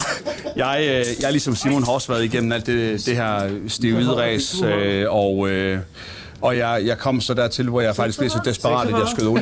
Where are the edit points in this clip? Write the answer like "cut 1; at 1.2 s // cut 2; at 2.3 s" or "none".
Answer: none